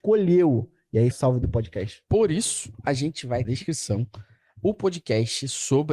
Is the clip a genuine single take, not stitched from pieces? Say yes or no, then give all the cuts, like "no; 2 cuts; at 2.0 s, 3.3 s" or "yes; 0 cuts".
no; 2 cuts; at 1.1 s, 3.4 s